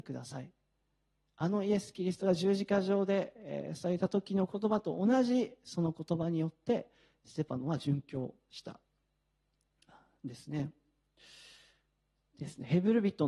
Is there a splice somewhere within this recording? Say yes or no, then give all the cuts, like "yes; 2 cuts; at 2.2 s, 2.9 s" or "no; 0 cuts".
no; 0 cuts